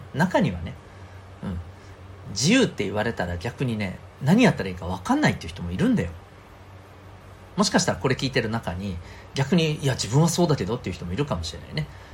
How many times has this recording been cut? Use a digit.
1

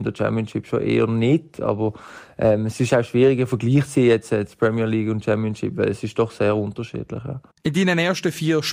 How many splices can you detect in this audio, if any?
1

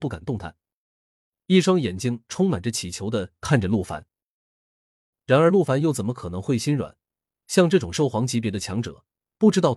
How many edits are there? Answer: 0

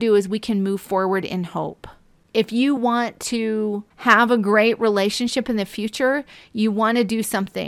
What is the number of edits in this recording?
0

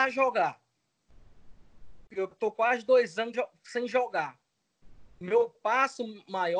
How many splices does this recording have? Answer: 2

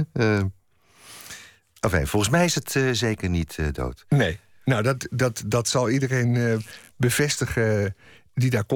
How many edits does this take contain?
0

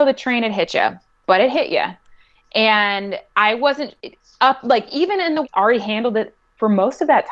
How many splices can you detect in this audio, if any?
1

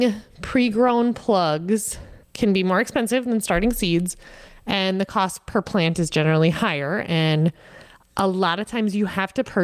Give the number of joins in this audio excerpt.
1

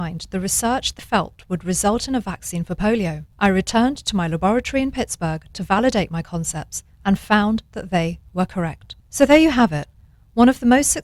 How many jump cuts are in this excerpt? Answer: 4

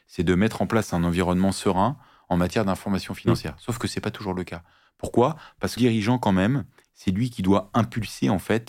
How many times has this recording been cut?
1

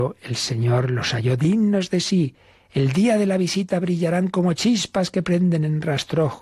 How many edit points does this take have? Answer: 0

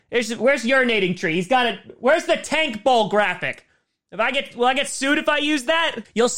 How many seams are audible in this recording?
0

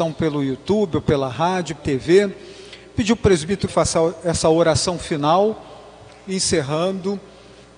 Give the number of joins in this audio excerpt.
2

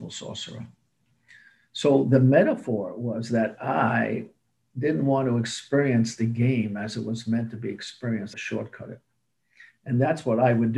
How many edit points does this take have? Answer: 1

